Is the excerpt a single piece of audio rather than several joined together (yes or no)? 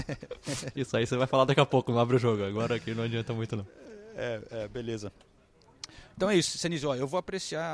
yes